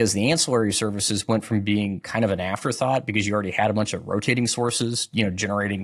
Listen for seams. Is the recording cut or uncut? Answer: uncut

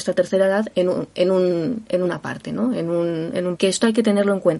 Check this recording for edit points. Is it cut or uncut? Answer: cut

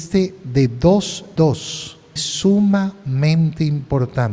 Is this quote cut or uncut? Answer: cut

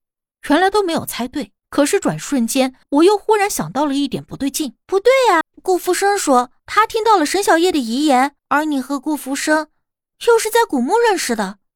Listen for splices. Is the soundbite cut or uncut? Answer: cut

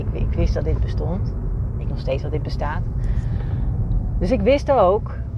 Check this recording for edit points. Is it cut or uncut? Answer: cut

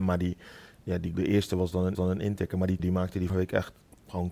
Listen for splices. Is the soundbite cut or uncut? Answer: cut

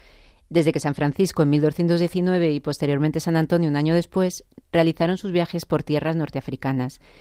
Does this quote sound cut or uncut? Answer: uncut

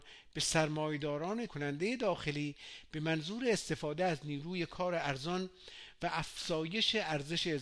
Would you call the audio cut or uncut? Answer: cut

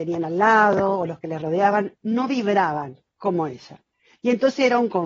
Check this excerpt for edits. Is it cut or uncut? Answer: cut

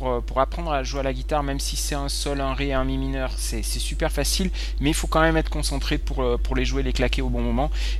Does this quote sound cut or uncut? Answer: uncut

